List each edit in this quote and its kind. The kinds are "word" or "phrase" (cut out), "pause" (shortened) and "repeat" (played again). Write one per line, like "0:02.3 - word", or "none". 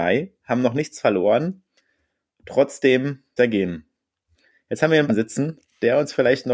0:03.4 - word
0:05.1 - word